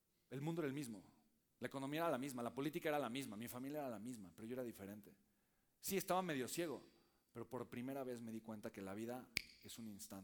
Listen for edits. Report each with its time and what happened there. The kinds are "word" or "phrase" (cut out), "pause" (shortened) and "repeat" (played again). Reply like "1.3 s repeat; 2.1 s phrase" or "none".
none